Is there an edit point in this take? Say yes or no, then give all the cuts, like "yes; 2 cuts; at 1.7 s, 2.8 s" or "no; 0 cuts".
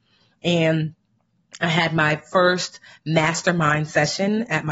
no; 0 cuts